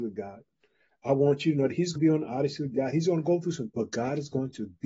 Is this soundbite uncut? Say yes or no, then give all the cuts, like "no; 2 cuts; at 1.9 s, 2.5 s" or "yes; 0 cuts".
no; 2 cuts; at 2.0 s, 3.7 s